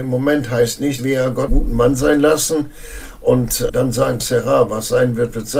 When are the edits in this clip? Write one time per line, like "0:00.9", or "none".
0:01.0
0:01.5
0:03.7
0:04.2